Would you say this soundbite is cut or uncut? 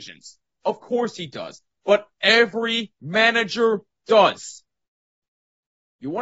uncut